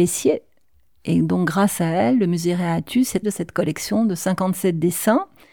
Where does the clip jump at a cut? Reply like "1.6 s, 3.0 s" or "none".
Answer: 3.2 s